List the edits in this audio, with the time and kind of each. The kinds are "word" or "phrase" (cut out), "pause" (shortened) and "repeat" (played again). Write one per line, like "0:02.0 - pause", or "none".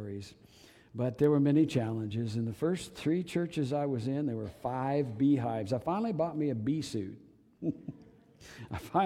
none